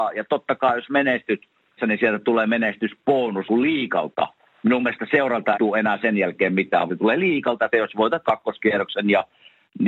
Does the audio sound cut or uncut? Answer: cut